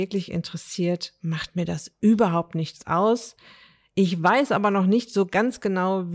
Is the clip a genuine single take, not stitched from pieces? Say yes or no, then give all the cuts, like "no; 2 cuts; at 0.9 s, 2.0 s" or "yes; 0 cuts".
yes; 0 cuts